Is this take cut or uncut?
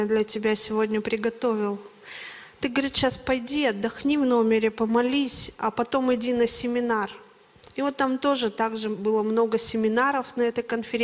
uncut